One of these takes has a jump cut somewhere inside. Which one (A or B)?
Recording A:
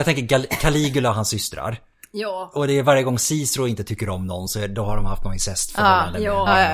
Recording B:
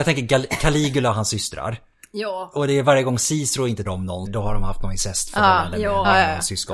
B